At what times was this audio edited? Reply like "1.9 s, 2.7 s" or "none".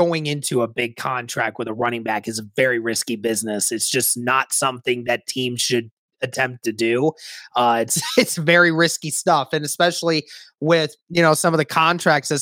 none